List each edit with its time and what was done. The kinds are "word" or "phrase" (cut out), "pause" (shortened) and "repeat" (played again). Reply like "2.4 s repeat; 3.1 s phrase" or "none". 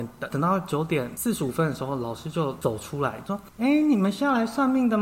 3.5 s pause

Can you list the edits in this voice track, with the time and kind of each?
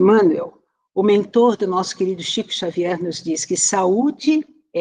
none

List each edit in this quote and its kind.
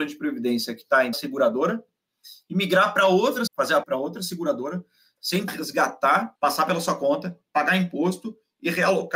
1.1 s word; 3.5 s word; 3.8 s word; 5.5 s word; 6.3 s pause

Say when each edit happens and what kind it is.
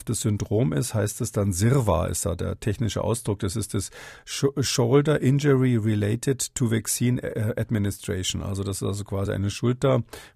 none

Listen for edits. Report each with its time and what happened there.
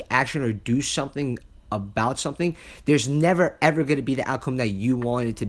none

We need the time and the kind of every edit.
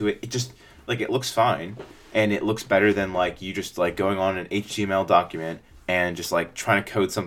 none

